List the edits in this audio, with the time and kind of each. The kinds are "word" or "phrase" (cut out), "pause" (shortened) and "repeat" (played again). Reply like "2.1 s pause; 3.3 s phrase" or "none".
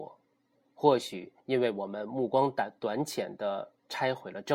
1.4 s pause